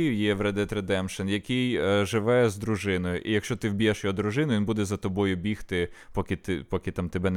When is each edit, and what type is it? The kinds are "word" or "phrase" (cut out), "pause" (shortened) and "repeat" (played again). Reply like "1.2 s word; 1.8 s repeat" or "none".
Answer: none